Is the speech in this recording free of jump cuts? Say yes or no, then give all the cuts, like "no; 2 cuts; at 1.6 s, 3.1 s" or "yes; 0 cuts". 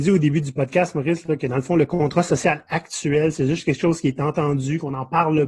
yes; 0 cuts